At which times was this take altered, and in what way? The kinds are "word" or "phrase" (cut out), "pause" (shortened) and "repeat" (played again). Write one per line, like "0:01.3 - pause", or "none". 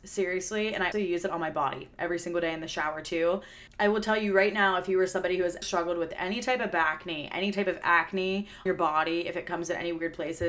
0:00.9 - word
0:05.6 - word
0:08.7 - word